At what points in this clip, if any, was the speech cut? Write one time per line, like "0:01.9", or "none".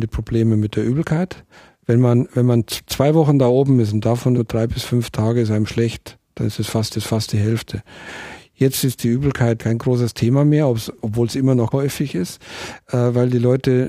0:01.5
0:04.3
0:06.9
0:09.6
0:11.7